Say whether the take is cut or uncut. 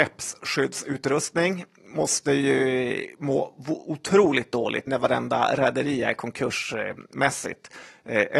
cut